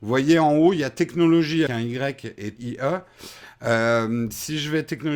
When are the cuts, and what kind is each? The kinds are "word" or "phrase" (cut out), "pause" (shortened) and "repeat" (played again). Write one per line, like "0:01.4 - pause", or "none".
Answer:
0:01.7 - word
0:02.6 - word